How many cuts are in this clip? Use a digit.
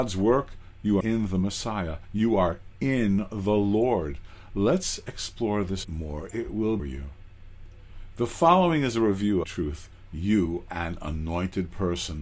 5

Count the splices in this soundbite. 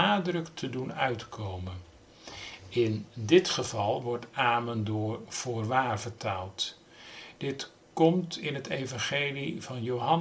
0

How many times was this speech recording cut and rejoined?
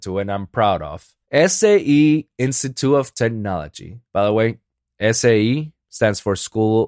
3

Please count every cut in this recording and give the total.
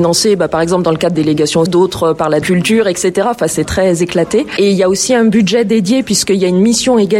4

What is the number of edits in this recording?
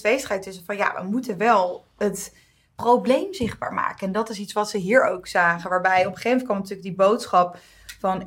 0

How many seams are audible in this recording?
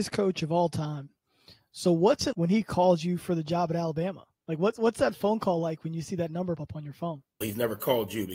3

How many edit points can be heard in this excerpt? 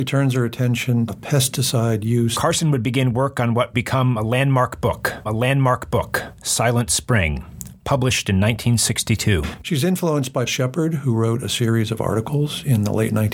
4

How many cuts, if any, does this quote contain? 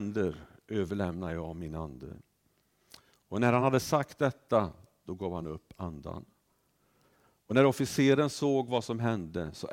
0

